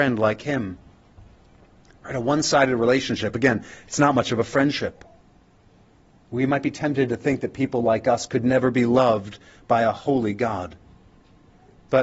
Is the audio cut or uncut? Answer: uncut